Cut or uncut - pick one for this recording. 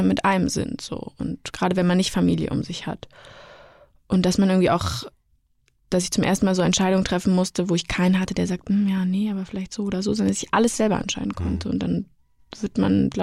uncut